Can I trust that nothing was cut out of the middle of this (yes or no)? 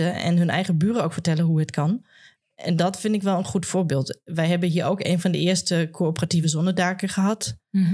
yes